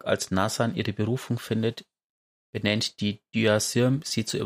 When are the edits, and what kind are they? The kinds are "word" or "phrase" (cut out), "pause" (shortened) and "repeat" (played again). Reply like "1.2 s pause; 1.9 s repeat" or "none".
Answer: none